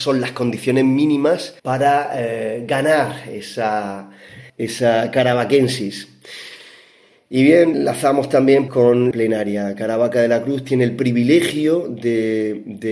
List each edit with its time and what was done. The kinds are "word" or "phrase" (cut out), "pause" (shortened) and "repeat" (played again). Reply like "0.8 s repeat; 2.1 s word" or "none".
1.6 s pause; 4.5 s pause; 7.7 s word; 8.7 s word; 9.1 s phrase